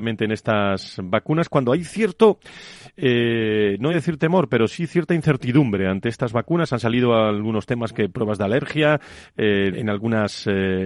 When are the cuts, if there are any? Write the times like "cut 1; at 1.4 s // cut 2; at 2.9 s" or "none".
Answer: cut 1; at 3.9 s // cut 2; at 9.7 s